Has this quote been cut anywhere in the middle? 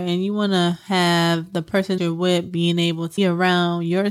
yes; 2 cuts; at 2.0 s, 3.2 s

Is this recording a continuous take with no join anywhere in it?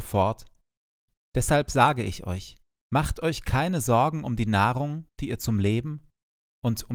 no; 1 cut; at 2.7 s

